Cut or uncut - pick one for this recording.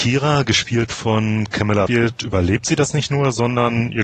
cut